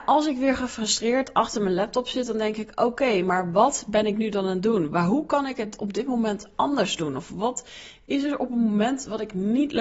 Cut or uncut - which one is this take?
uncut